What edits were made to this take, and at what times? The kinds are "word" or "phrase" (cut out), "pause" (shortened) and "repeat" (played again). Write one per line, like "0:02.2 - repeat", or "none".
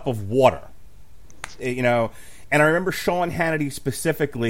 none

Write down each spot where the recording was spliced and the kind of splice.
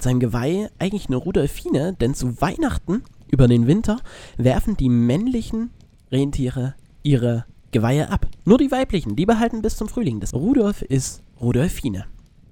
0:10.3 - word

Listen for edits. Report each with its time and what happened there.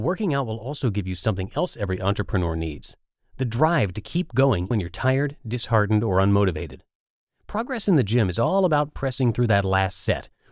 0:04.7 - word

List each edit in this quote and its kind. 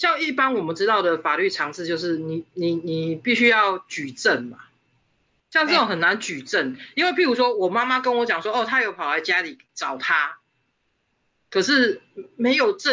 none

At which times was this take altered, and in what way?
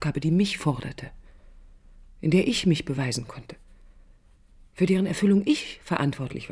none

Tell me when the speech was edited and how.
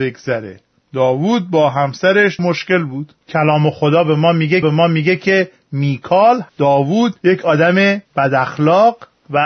0:02.4 - word
0:03.2 - pause
0:04.6 - repeat
0:06.5 - word
0:07.2 - pause
0:08.1 - pause

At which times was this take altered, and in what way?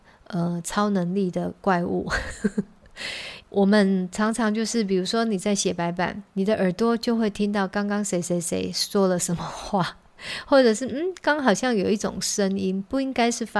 0:03.4 - phrase

